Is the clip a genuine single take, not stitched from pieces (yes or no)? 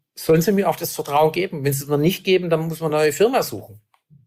yes